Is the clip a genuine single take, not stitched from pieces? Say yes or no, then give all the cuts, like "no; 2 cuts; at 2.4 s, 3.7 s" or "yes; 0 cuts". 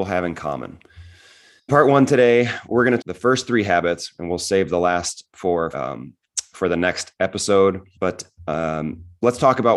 no; 4 cuts; at 1.7 s, 3.0 s, 5.7 s, 7.9 s